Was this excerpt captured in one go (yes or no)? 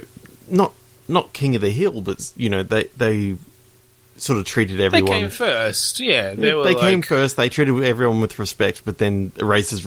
yes